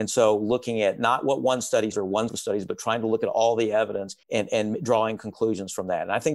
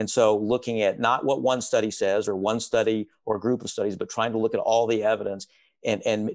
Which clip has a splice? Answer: first; 3 cuts; at 1.9 s, 2.3 s, 4.2 s

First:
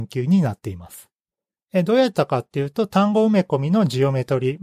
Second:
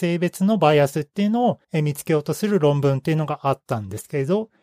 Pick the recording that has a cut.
second; 1 cut; at 1.6 s

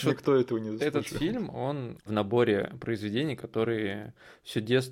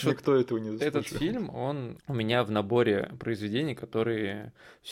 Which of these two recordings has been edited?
first; 1 cut; at 2.1 s

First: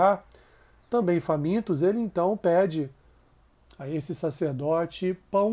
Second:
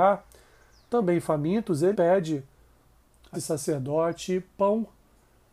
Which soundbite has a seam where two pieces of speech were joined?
second; 2 cuts; at 1.9 s, 3.3 s

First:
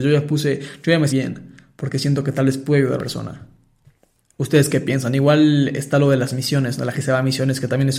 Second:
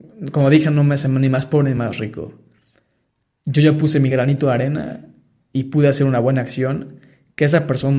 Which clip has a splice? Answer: first; 3 cuts; at 1.1 s, 3.0 s, 6.9 s

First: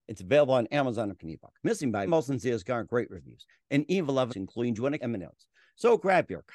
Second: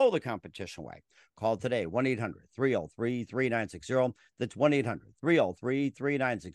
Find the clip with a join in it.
first; 5 cuts; at 1.2 s, 1.6 s, 2.1 s, 4.3 s, 5.0 s

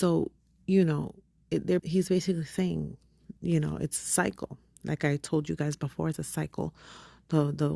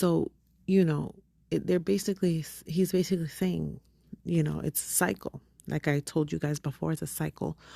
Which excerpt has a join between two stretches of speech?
first; 1 cut; at 1.8 s

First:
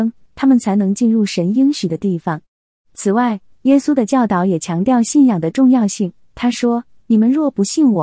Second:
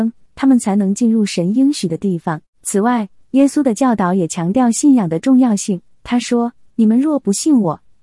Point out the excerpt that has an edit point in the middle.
second; 1 cut; at 2.5 s

